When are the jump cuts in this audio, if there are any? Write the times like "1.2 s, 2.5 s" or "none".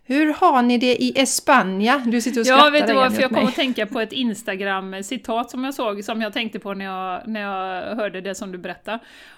none